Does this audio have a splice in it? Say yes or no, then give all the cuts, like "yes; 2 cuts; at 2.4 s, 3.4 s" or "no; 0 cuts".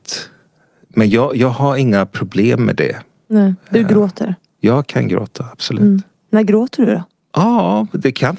no; 0 cuts